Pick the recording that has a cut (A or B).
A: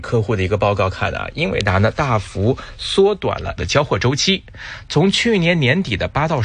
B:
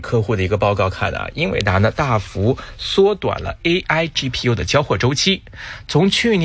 A